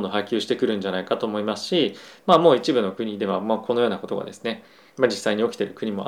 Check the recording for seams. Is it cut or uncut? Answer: uncut